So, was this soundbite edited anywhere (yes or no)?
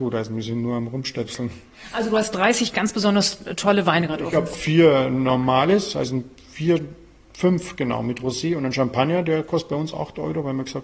no